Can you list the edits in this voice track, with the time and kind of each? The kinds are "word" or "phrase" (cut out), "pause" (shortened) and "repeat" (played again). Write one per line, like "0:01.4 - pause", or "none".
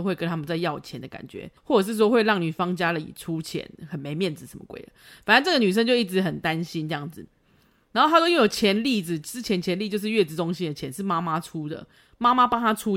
0:01.6 - pause